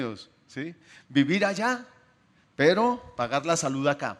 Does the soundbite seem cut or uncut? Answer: uncut